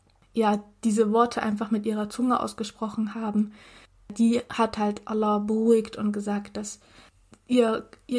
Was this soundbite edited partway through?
no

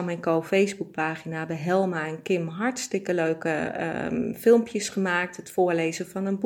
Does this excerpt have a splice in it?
no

